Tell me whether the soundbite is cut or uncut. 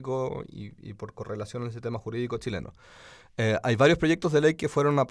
uncut